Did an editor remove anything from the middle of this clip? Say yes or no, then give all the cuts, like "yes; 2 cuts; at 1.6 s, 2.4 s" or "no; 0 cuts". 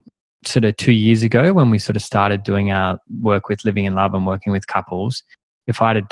no; 0 cuts